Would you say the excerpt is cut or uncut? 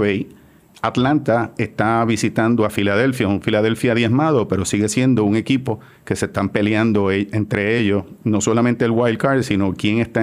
uncut